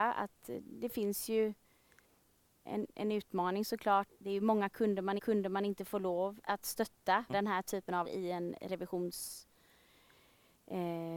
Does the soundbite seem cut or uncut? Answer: cut